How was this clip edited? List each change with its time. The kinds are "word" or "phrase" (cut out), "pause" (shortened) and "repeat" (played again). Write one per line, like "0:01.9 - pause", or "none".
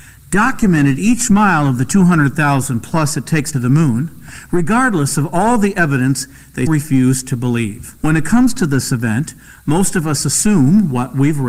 0:03.5 - phrase
0:06.7 - word
0:08.0 - pause